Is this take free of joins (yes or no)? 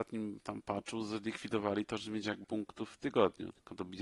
no